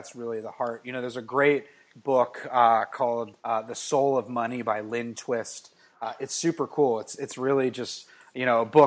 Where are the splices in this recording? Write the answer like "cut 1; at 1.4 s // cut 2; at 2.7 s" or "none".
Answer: cut 1; at 3.4 s